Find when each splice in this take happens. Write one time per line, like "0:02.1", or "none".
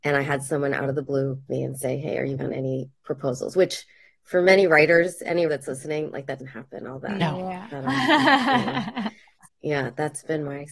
0:01.5
0:02.4
0:05.5
0:06.4
0:09.4